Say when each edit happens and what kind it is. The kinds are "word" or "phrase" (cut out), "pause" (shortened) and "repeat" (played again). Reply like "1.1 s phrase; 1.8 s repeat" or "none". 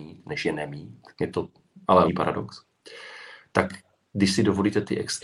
1.1 s pause; 2.1 s word